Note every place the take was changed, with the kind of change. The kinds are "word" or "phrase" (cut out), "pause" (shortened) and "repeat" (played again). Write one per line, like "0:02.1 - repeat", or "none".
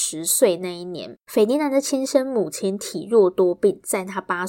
0:01.2 - pause